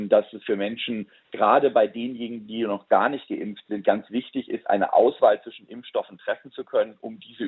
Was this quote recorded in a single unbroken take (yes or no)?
yes